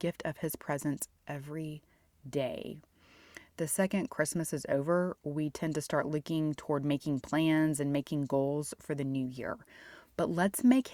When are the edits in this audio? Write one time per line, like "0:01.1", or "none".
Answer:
none